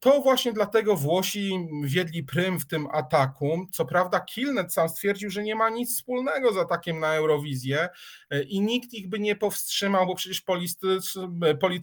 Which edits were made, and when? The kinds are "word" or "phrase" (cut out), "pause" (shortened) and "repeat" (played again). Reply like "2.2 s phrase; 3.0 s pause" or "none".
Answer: none

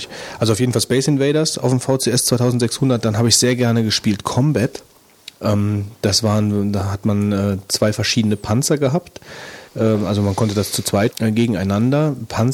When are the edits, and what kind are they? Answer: 9.7 s pause; 11.1 s word

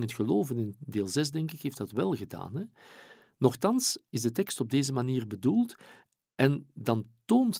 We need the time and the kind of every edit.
none

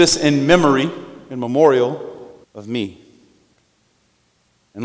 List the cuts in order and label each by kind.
2.4 s pause

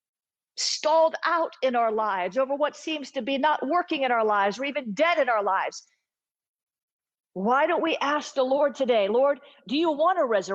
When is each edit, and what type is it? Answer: none

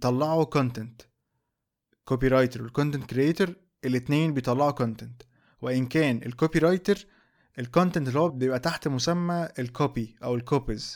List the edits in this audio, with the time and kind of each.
8.3 s word

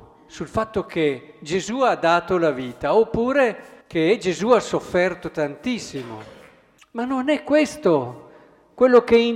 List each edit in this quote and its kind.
3.8 s pause; 6.8 s pause

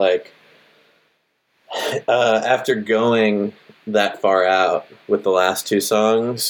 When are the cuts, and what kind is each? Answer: none

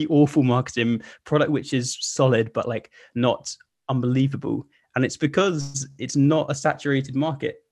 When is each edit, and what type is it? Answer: none

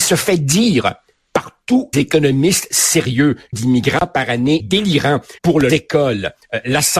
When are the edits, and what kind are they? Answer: 1.9 s word; 3.5 s phrase; 4.6 s word; 5.4 s pause; 5.7 s phrase

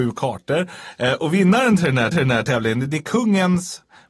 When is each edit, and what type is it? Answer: 2.1 s repeat

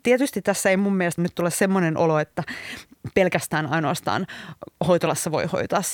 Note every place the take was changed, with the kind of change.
1.2 s word

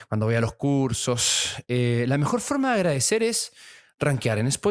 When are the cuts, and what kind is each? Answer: none

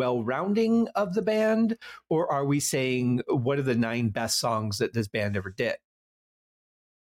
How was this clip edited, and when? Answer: none

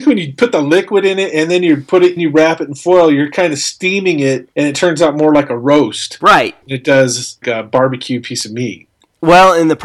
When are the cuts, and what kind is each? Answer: 2.2 s phrase; 4.5 s pause; 6.6 s pause; 7.4 s word

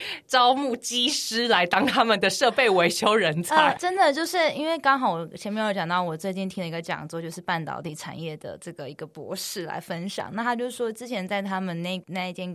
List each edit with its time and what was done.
3.8 s word

